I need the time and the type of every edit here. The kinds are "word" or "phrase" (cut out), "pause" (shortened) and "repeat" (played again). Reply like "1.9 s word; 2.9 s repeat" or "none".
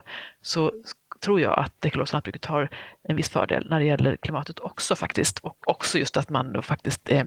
none